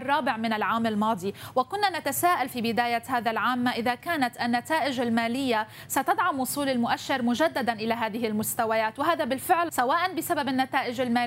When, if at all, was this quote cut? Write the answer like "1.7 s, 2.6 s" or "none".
9.7 s